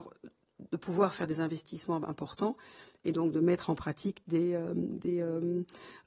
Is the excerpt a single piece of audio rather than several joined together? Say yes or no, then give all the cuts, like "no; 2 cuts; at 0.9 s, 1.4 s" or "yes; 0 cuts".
yes; 0 cuts